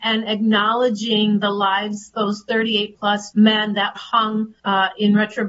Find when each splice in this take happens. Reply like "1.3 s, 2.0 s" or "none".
3.3 s, 4.0 s, 4.6 s